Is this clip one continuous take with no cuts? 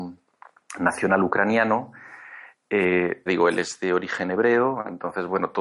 no; 1 cut; at 3.3 s

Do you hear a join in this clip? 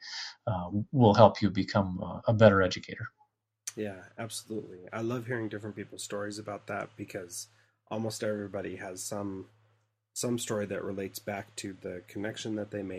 yes; 2 cuts; at 2.2 s, 4.9 s

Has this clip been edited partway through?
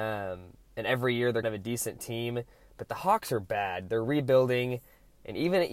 yes; 1 cut; at 1.4 s

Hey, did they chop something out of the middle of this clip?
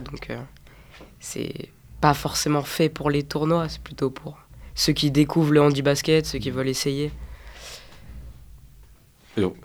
no; 0 cuts

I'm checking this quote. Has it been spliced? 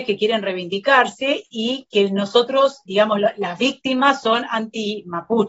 yes; 1 cut; at 2.9 s

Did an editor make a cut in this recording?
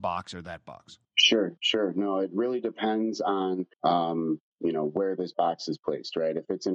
yes; 2 cuts; at 1.0 s, 3.7 s

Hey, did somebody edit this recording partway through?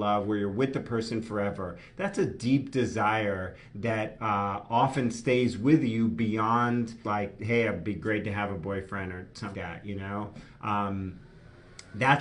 yes; 2 cuts; at 7.0 s, 9.5 s

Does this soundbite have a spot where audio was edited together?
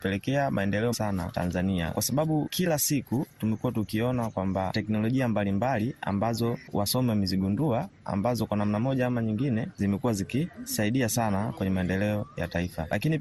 yes; 2 cuts; at 0.9 s, 4.7 s

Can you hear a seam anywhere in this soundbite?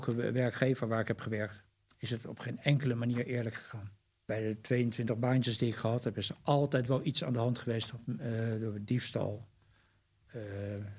no; 0 cuts

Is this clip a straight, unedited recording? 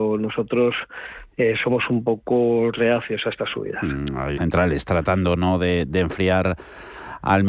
no; 1 cut; at 4.4 s

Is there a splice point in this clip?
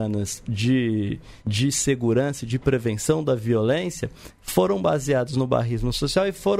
yes; 1 cut; at 1.4 s

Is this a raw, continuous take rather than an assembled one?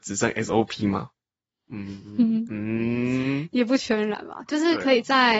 yes; 0 cuts

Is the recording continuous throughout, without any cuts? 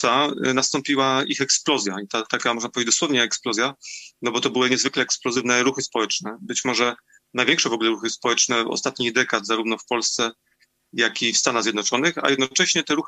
yes; 0 cuts

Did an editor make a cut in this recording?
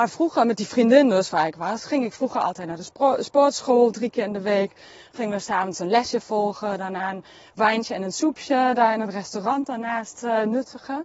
no; 0 cuts

